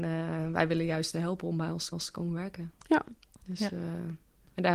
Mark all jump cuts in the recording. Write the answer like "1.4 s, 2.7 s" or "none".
1.1 s, 1.9 s